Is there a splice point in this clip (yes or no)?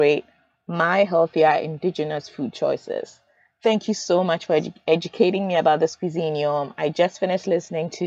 no